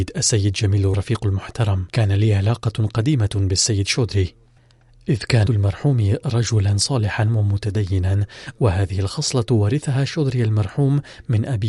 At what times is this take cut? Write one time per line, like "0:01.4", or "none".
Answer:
0:00.9
0:01.9
0:05.5